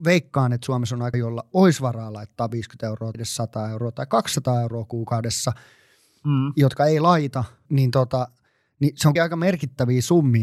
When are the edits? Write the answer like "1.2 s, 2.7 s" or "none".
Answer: 1.1 s, 3.1 s, 7.7 s, 9.2 s